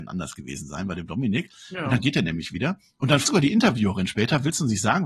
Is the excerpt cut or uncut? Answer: cut